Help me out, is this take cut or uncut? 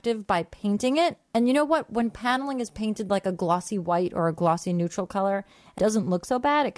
cut